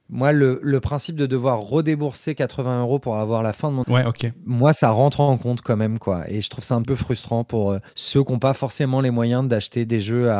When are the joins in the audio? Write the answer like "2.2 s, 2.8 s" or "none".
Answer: 3.8 s, 6.8 s, 7.9 s